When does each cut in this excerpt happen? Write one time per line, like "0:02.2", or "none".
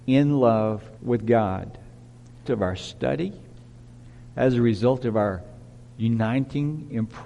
0:01.0
0:02.5